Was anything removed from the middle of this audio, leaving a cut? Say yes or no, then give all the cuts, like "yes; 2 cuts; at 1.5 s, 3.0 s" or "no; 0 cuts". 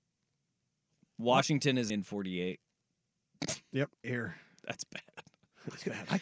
yes; 2 cuts; at 1.9 s, 4.0 s